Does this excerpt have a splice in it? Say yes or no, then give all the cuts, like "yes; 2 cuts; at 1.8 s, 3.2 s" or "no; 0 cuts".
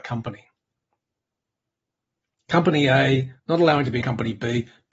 yes; 2 cuts; at 3.4 s, 4.0 s